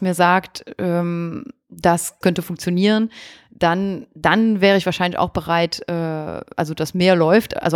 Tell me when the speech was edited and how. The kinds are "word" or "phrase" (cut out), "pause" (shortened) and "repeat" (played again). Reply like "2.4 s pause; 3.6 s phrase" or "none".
2.2 s word